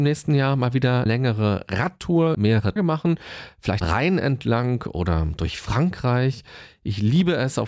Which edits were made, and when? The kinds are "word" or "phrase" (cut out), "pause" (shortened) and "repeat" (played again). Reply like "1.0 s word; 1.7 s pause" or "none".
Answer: 1.1 s word; 2.3 s word; 2.8 s word; 3.8 s word